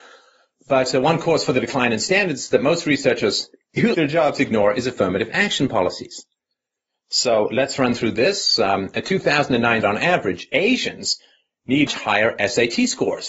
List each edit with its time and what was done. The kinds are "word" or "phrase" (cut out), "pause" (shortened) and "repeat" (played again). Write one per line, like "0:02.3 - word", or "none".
0:03.9 - word
0:09.8 - phrase
0:11.9 - word